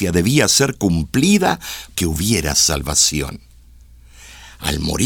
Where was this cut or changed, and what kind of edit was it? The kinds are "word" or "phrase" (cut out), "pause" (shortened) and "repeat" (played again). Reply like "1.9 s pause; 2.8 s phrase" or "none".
1.9 s word